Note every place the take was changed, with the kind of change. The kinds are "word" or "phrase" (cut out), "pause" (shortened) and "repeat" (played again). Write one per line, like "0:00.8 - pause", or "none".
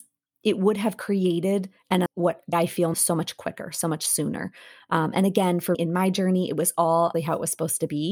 0:02.1 - word
0:02.5 - word
0:02.9 - word
0:05.7 - word
0:07.1 - word